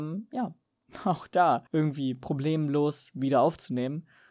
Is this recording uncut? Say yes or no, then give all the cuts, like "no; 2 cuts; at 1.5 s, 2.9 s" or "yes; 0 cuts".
no; 1 cut; at 1.7 s